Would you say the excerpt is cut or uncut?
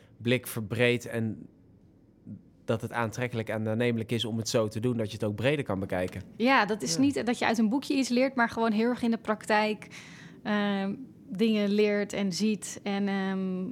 uncut